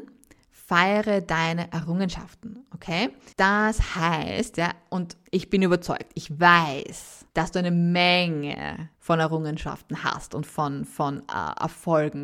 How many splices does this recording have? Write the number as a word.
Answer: four